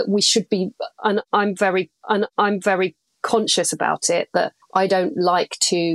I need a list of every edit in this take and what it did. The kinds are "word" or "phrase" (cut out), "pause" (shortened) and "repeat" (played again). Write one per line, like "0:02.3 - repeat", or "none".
0:02.0 - repeat
0:04.6 - pause